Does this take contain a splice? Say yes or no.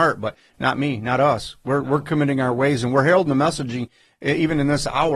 no